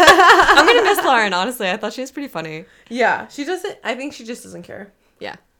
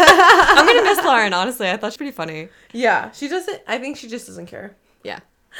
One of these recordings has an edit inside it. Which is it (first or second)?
second